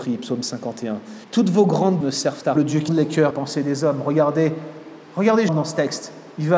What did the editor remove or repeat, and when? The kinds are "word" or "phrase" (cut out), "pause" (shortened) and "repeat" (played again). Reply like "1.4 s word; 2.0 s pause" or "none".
1.2 s pause; 2.0 s word; 2.6 s phrase; 2.9 s word; 3.3 s phrase; 5.5 s word